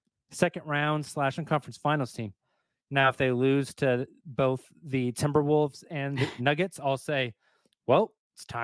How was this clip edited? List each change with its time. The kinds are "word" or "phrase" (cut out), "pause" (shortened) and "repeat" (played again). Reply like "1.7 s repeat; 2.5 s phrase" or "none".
1.4 s word; 6.4 s word